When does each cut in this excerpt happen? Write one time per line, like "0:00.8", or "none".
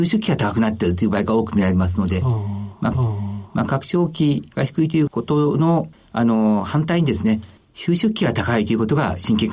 0:02.9